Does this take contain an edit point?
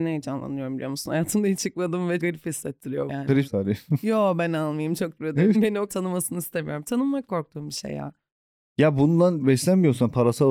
yes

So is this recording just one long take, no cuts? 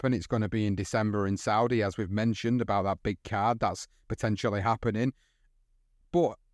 yes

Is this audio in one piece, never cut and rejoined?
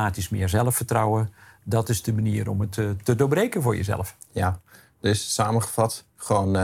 yes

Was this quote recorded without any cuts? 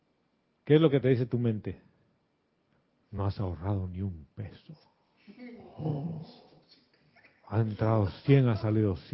yes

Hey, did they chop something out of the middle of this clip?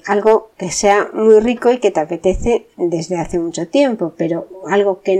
no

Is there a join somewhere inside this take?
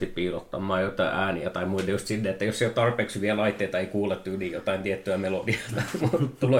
no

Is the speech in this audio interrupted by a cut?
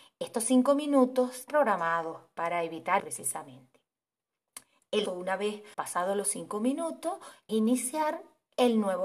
yes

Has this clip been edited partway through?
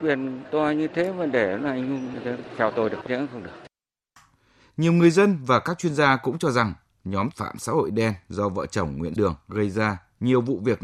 yes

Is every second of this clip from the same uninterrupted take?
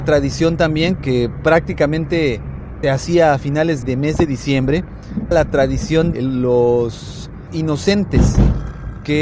no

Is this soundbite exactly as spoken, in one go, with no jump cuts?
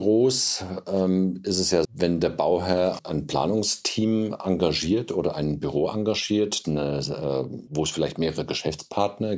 no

